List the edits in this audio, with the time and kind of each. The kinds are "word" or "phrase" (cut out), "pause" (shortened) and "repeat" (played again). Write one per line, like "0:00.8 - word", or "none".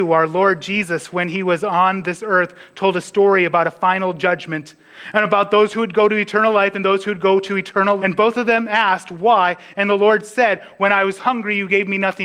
0:08.0 - word